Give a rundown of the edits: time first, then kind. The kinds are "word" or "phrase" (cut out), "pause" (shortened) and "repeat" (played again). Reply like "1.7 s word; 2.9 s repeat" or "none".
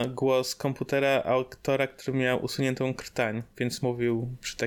none